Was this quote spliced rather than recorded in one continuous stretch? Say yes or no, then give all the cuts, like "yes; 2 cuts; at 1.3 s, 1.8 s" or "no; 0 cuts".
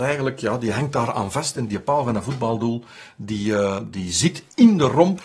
yes; 1 cut; at 1.7 s